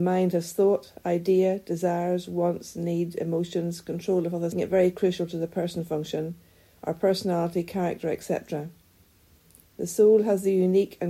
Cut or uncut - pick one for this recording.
cut